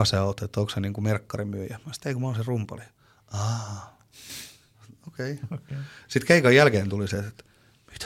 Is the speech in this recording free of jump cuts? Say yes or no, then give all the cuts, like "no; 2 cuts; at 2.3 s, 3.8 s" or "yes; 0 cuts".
yes; 0 cuts